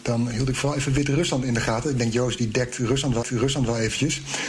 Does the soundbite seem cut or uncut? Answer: cut